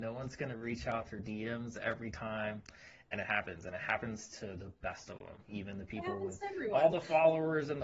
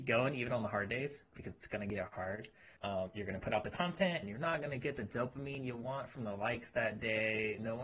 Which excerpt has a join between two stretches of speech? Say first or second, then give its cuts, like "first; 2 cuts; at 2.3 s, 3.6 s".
second; 2 cuts; at 2.8 s, 4.2 s